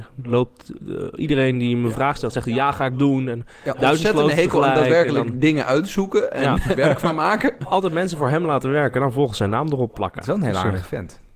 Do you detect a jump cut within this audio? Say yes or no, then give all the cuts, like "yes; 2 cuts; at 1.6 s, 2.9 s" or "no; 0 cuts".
yes; 2 cuts; at 6.7 s, 9.9 s